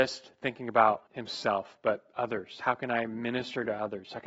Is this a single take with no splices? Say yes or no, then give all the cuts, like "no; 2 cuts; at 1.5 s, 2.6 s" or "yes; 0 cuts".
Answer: no; 1 cut; at 1.1 s